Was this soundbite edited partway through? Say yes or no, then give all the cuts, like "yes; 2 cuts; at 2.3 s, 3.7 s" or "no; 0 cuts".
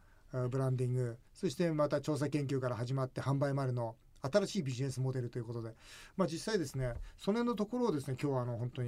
yes; 1 cut; at 1.3 s